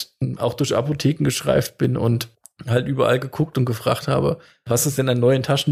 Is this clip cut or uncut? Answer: uncut